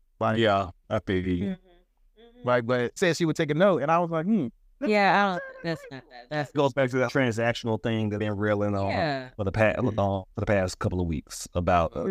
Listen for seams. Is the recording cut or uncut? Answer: cut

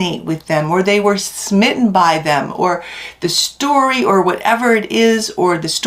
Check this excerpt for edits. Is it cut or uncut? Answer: uncut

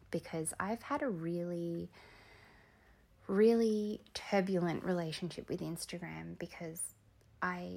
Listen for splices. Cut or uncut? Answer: uncut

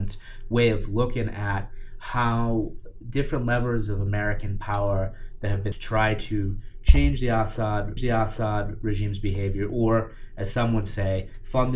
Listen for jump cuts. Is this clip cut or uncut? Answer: cut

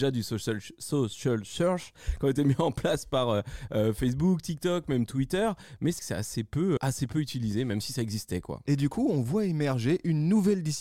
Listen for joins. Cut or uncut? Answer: cut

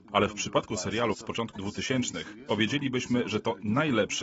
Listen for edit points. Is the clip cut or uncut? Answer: cut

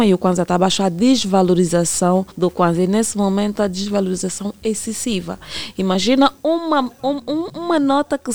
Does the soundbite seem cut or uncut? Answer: cut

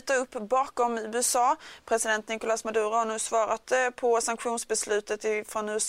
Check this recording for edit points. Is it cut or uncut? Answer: uncut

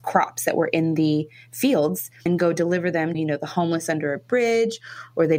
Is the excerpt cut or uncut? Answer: cut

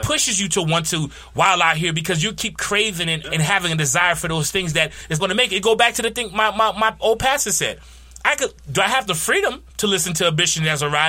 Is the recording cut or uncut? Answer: cut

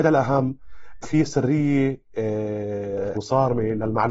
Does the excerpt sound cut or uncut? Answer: cut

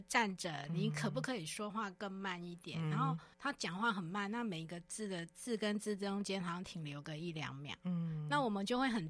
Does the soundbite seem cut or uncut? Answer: cut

